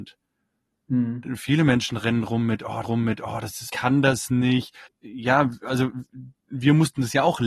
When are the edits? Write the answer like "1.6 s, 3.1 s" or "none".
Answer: 2.8 s, 3.7 s, 4.9 s